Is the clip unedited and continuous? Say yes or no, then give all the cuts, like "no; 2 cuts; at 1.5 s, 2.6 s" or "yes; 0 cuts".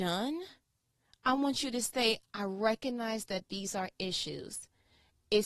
yes; 0 cuts